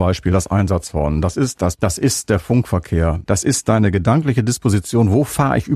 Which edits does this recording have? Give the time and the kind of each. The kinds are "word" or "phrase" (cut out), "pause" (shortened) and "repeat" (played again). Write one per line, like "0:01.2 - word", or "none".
0:01.8 - word
0:03.2 - pause